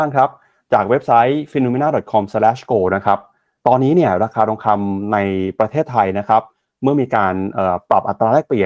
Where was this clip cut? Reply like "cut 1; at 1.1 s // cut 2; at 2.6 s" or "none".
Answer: none

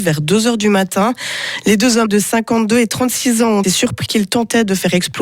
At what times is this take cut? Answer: cut 1; at 2.1 s // cut 2; at 3.6 s // cut 3; at 4.1 s

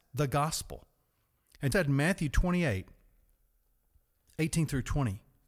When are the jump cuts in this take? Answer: cut 1; at 1.7 s

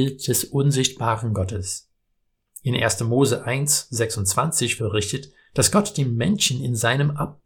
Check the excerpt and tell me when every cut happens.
cut 1; at 4.8 s

